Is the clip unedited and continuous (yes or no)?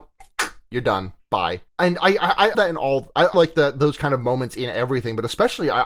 no